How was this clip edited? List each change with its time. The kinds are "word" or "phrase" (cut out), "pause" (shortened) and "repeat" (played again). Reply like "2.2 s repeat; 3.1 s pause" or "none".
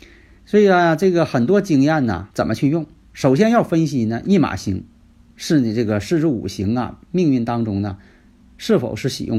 2.3 s pause